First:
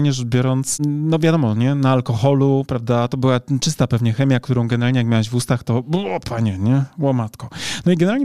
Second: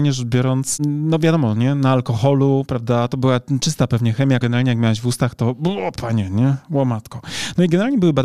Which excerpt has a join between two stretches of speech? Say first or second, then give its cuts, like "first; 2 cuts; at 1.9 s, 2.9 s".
second; 1 cut; at 4.4 s